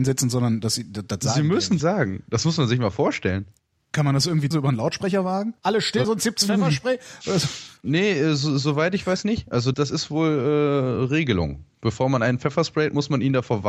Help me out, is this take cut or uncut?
cut